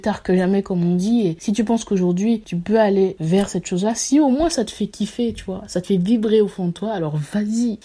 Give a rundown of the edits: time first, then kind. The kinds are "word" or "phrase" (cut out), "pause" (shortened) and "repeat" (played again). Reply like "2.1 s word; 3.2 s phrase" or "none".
none